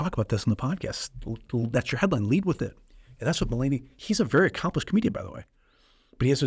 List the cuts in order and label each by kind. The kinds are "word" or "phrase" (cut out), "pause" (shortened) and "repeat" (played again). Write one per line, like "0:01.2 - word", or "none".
none